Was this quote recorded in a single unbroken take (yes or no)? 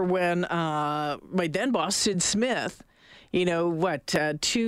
yes